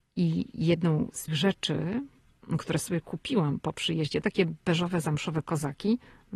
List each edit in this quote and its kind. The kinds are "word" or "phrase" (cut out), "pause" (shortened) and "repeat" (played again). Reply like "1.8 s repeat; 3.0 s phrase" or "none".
1.3 s word; 3.6 s word; 4.2 s phrase

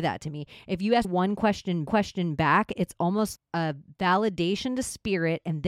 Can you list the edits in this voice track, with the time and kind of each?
1.0 s word; 1.9 s repeat; 3.4 s word

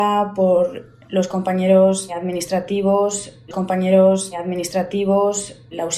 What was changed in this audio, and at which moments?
3.5 s repeat

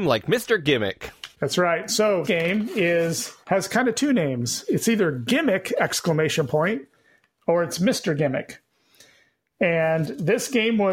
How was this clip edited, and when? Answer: 1.3 s pause; 2.2 s word; 3.4 s pause

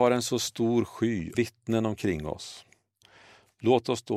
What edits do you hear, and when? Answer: 1.3 s word

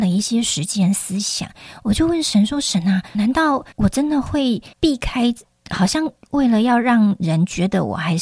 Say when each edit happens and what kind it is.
3.1 s word; 3.7 s pause; 4.7 s pause

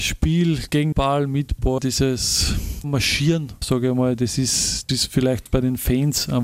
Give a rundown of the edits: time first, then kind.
0.9 s word; 1.8 s word; 2.8 s word; 3.6 s word; 4.9 s word; 5.5 s word

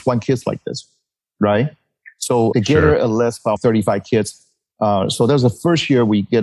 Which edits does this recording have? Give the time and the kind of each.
2.5 s word; 3.6 s word

